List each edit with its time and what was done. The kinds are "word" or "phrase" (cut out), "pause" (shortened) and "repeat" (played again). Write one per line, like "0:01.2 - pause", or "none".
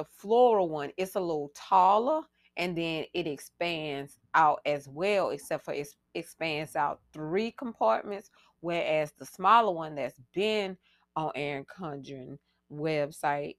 none